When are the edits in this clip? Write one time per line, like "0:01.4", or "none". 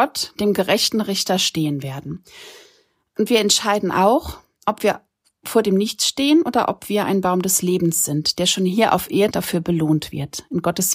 0:09.3